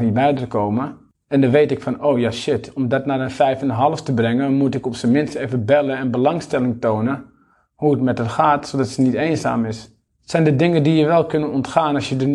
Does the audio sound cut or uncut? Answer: uncut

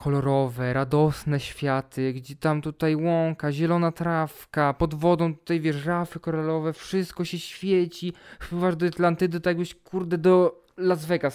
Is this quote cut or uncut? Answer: uncut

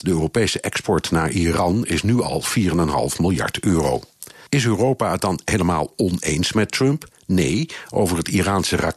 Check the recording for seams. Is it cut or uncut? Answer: uncut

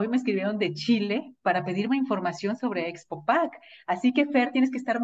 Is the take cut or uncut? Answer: uncut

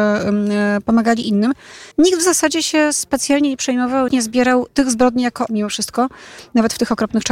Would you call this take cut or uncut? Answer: cut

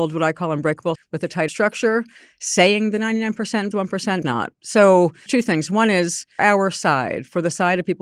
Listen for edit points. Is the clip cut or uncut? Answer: cut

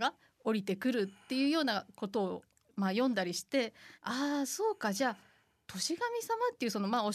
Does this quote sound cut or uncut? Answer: cut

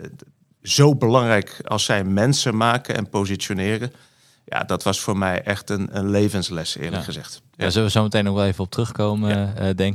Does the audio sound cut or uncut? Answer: uncut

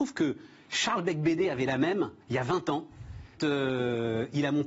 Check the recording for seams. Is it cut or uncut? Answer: cut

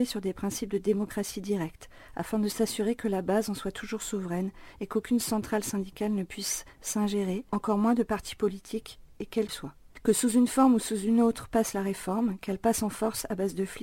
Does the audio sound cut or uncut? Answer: cut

